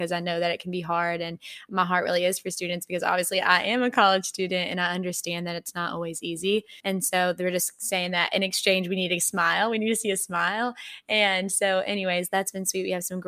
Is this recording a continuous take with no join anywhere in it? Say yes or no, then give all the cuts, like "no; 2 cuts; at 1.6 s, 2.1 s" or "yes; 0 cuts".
no; 1 cut; at 6.8 s